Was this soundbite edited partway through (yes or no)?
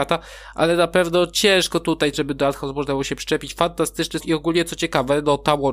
yes